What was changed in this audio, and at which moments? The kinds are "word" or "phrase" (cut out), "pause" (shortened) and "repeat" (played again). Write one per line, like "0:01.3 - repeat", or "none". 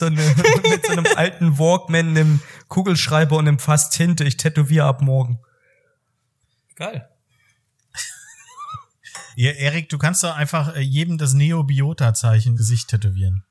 0:09.3 - pause
0:12.6 - word